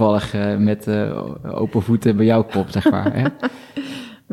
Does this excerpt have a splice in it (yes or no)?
no